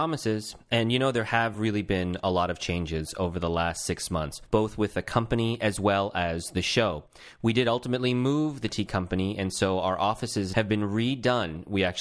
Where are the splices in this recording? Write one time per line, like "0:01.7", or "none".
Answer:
none